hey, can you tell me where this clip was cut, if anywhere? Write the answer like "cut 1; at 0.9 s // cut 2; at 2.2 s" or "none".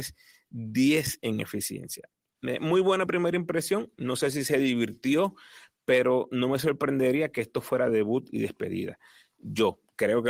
none

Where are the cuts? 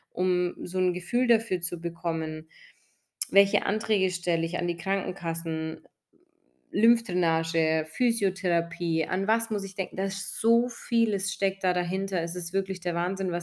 none

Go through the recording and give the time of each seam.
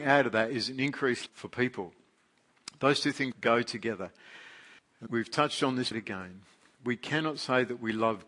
cut 1; at 1.3 s // cut 2; at 3.3 s // cut 3; at 5.1 s // cut 4; at 5.9 s

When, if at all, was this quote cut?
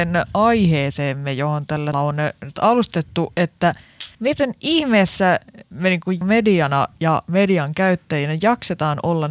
cut 1; at 1.9 s // cut 2; at 4.1 s // cut 3; at 6.2 s

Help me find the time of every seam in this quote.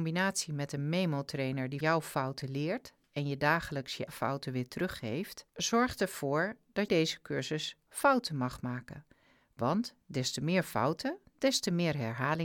cut 1; at 1.8 s // cut 2; at 4.1 s // cut 3; at 5.5 s // cut 4; at 6.9 s

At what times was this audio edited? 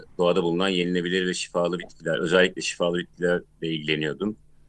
none

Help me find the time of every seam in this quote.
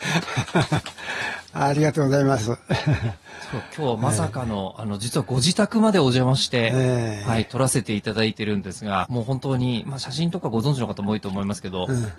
cut 1; at 9.0 s

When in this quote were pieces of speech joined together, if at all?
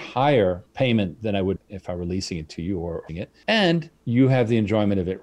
cut 1; at 1.6 s // cut 2; at 3.1 s

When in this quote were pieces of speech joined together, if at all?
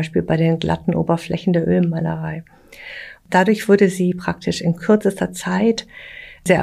none

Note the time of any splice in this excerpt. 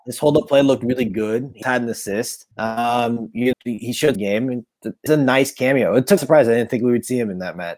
cut 1; at 1.6 s // cut 2; at 2.5 s // cut 3; at 3.5 s // cut 4; at 4.2 s // cut 5; at 5.1 s // cut 6; at 6.2 s

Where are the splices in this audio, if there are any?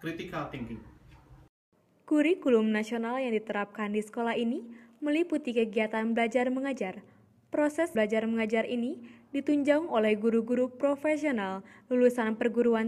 cut 1; at 7.9 s

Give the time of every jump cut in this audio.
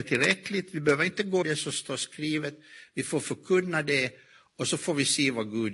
cut 1; at 1.4 s

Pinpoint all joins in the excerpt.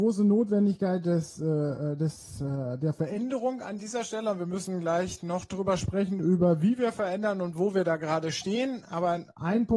none

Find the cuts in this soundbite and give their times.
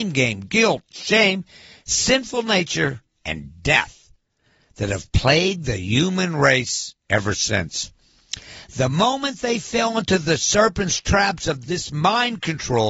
none

